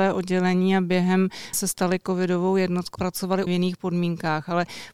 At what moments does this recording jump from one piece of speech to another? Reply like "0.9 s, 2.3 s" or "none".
1.5 s, 3.0 s, 3.5 s

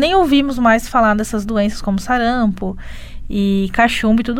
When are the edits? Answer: none

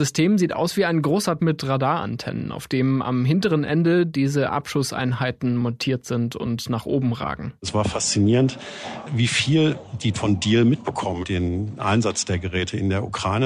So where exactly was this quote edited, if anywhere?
1.4 s, 7.6 s, 10.1 s, 11.2 s

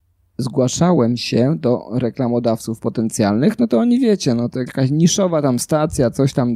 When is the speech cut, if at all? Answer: 4.7 s

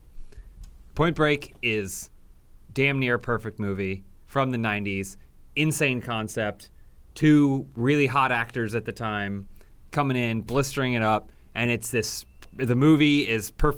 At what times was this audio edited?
none

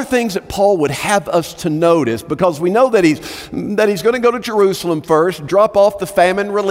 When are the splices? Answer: none

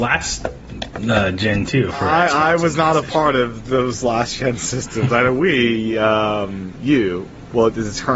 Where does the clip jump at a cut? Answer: none

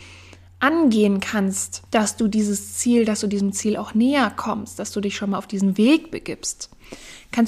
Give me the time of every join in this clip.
1.9 s

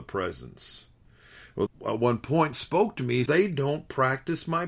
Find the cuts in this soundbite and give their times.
1.7 s, 2.5 s, 3.3 s

